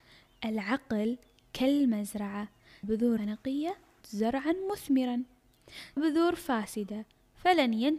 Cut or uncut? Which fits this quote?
cut